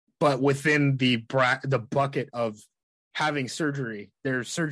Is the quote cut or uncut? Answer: uncut